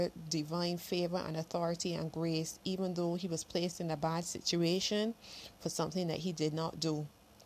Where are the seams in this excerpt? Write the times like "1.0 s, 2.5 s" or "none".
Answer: none